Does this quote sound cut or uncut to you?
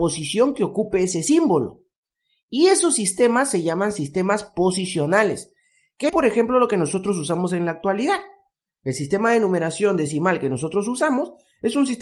cut